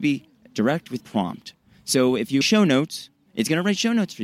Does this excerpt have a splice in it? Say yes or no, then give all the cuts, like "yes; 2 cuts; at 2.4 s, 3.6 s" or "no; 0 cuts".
yes; 3 cuts; at 1.0 s, 2.4 s, 3.3 s